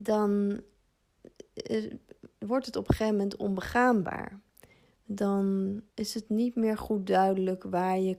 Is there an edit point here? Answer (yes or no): yes